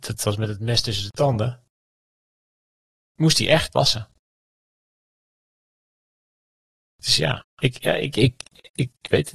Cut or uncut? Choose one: uncut